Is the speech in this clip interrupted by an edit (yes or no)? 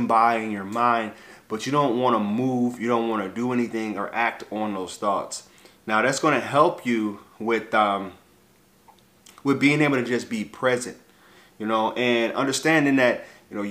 no